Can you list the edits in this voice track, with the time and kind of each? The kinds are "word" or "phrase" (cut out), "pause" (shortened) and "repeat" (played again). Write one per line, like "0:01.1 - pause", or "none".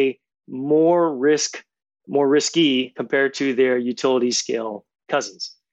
none

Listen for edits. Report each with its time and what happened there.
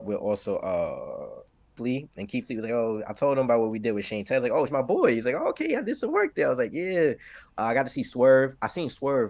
0:01.8 - word
0:04.7 - word

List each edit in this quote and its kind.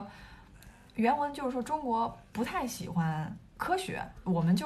0:03.5 - pause

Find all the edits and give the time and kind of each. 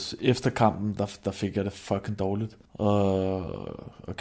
0:02.6 - pause

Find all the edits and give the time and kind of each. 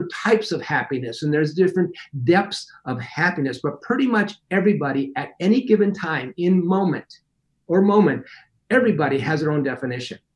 none

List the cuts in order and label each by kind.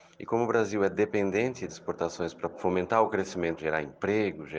0:01.7 - word
0:02.5 - word
0:03.6 - word

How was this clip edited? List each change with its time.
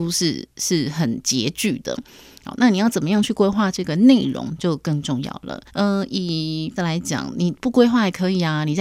0:05.7 - pause
0:06.8 - word

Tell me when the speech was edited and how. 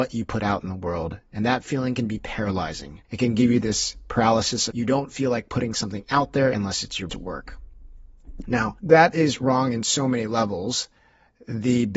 0:03.0 - pause
0:04.7 - phrase
0:07.1 - word
0:08.8 - pause

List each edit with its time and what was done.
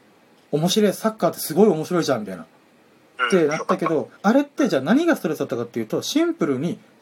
0:04.2 - pause

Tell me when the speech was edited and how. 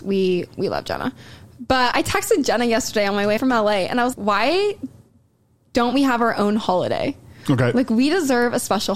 0:01.9 - word
0:03.4 - word
0:04.1 - word

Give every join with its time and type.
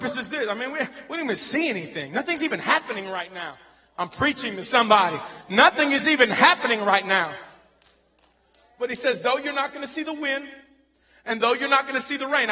none

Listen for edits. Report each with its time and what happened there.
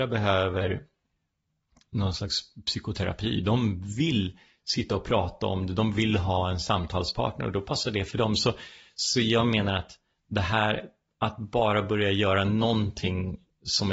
none

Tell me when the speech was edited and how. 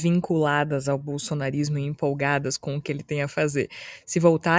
none

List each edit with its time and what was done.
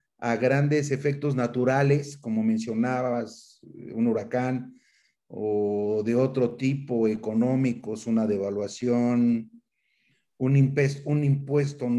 none

